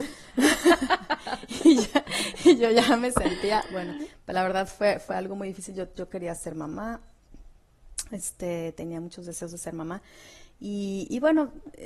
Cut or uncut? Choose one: uncut